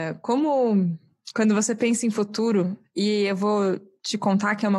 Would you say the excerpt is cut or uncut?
uncut